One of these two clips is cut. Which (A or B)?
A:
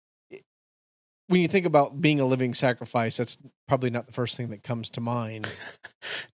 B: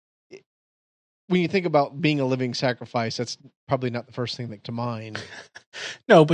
B